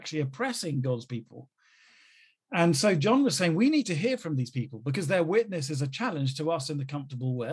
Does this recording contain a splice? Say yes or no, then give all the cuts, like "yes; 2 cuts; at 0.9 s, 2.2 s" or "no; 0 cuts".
no; 0 cuts